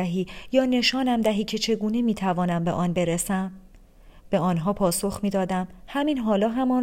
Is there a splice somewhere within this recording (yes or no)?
no